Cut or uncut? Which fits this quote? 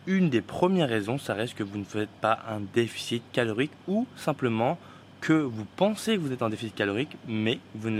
uncut